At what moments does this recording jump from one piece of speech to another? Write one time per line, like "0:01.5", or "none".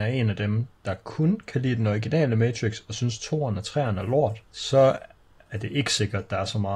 0:04.5